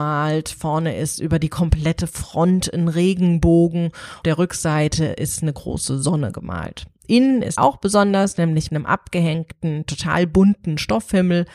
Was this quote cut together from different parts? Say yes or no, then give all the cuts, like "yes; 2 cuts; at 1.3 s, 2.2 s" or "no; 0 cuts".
yes; 3 cuts; at 4.2 s, 7.6 s, 8.7 s